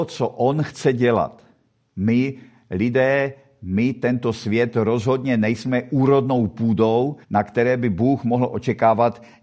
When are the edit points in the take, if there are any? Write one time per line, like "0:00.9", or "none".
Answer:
0:07.2